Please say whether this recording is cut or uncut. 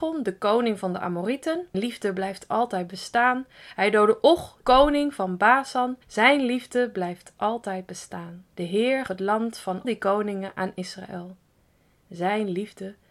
cut